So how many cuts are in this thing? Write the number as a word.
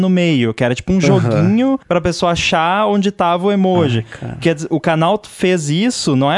one